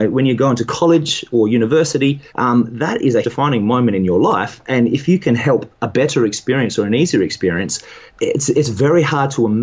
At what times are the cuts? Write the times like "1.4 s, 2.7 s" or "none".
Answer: 2.3 s, 3.2 s, 5.7 s, 8.1 s